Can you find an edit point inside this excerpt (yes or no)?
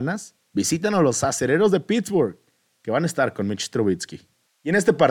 no